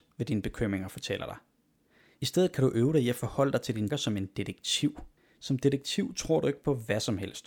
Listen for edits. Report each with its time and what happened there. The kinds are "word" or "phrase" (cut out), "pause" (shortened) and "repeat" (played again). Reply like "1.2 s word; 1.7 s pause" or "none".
3.9 s word; 5.2 s pause